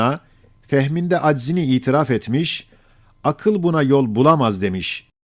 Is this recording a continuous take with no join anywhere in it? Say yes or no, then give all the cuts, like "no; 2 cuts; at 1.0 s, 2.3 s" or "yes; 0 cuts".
yes; 0 cuts